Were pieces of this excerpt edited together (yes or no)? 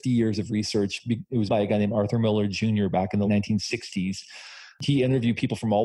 yes